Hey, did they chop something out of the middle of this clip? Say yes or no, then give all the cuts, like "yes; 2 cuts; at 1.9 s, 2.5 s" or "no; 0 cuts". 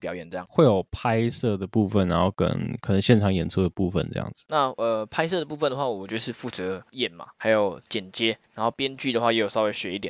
yes; 2 cuts; at 6.9 s, 8.4 s